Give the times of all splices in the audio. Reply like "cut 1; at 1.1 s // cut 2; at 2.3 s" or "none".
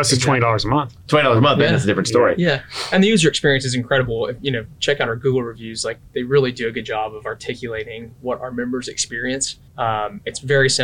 cut 1; at 9.7 s